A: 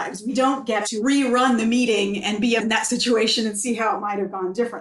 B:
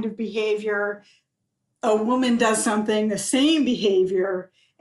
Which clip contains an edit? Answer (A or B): A